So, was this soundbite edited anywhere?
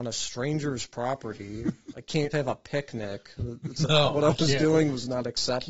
yes; 1 cut; at 2.3 s

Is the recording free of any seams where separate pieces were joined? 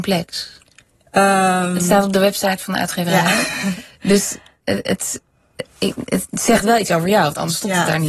yes; 0 cuts

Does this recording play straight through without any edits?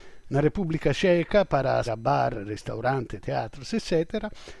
no; 1 cut; at 1.9 s

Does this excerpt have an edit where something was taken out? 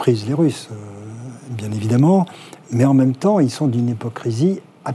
no; 0 cuts

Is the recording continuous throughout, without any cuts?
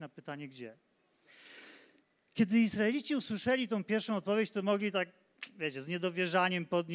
yes; 0 cuts

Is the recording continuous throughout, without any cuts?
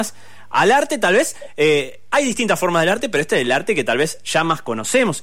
yes; 0 cuts

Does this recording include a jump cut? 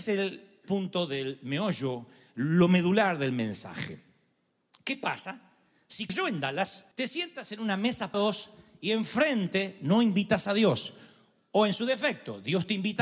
yes; 3 cuts; at 6.1 s, 6.9 s, 8.1 s

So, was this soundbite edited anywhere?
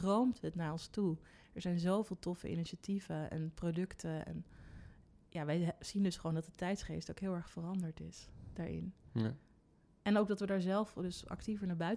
no; 0 cuts

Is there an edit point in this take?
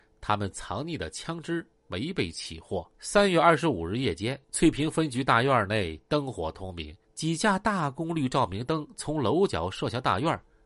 yes; 4 cuts; at 1.8 s, 2.9 s, 4.4 s, 7.0 s

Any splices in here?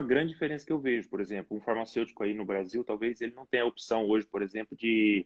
no; 0 cuts

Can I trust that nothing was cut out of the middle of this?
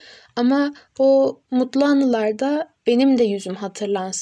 no; 1 cut; at 2.8 s

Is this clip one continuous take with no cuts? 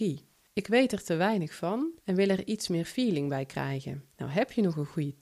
no; 2 cuts; at 2.0 s, 4.1 s

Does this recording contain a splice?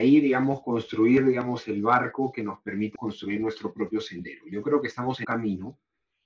yes; 2 cuts; at 3.0 s, 5.2 s

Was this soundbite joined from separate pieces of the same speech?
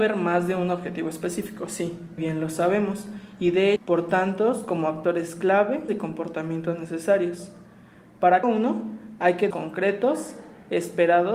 yes; 5 cuts; at 2.2 s, 3.8 s, 5.9 s, 8.4 s, 9.5 s

